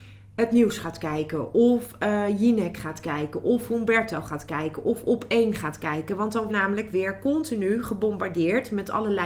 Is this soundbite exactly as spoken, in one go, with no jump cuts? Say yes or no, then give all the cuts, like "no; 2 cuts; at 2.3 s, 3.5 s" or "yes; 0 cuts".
no; 1 cut; at 6.5 s